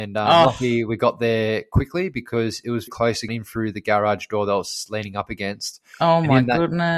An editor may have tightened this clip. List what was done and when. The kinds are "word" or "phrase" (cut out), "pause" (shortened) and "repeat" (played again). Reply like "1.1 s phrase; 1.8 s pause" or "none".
2.9 s word; 3.3 s word

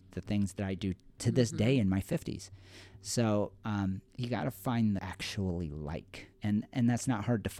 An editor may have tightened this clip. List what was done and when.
4.1 s pause; 5.0 s phrase; 6.3 s pause

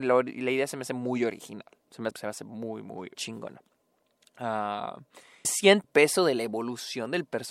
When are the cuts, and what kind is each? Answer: 2.1 s word; 3.1 s word; 5.4 s word; 5.8 s word

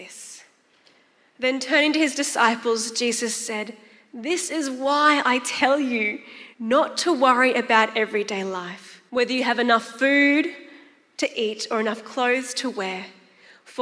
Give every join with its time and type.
6.5 s pause; 9.1 s pause

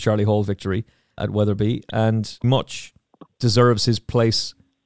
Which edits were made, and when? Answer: 1.2 s word; 2.4 s word

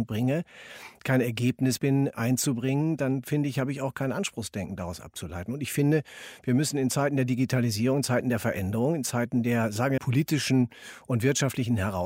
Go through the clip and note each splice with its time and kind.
1.8 s word; 10.0 s word

